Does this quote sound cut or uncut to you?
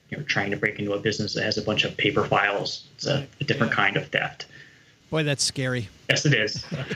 cut